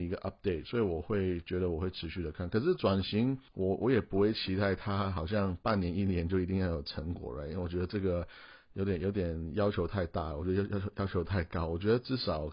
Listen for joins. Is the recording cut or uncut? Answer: cut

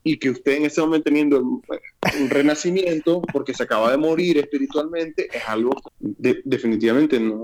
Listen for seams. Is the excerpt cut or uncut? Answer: cut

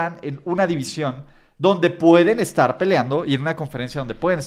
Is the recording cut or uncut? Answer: uncut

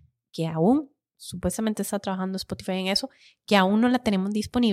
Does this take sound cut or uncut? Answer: uncut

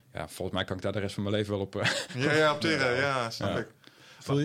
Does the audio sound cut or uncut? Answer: uncut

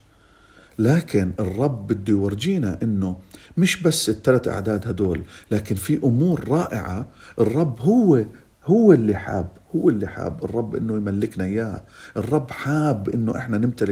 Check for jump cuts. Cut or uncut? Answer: uncut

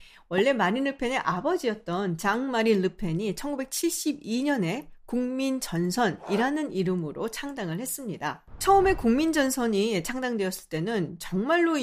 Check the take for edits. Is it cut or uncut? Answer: uncut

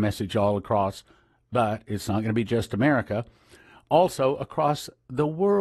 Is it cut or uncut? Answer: uncut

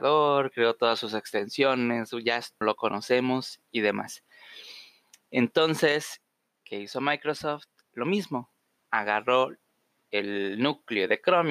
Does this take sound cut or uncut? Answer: cut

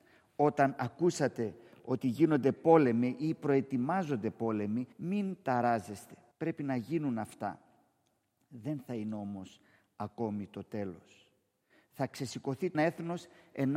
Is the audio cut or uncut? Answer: cut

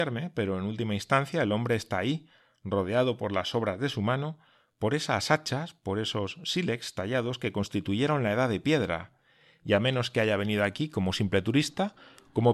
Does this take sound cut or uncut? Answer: uncut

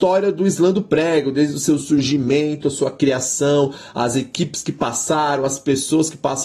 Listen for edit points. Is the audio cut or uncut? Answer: uncut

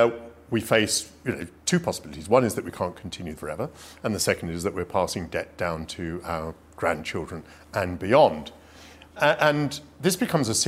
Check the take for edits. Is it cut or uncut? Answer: cut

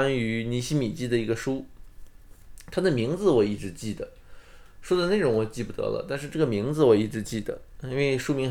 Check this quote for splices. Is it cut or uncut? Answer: uncut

